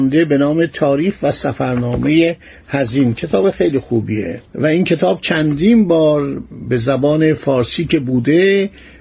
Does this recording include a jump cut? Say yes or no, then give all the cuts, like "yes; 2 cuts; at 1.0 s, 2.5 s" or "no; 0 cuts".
no; 0 cuts